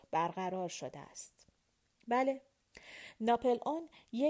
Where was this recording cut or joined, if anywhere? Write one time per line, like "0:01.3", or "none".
none